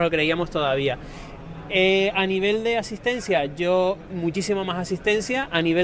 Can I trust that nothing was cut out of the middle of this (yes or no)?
no